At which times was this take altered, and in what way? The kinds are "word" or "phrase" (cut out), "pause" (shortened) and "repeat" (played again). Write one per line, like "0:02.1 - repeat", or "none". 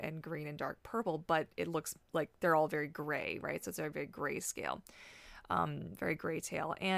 0:02.0 - pause